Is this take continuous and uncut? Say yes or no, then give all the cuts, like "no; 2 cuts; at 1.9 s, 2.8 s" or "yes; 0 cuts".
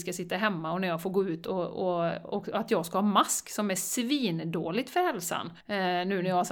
no; 1 cut; at 5.6 s